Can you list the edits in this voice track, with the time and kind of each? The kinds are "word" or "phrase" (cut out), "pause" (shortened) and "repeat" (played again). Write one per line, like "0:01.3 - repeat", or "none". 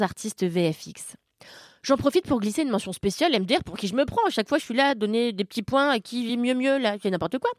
none